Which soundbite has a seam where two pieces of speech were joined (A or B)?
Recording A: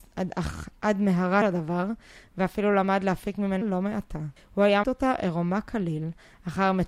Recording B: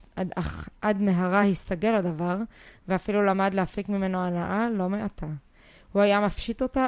A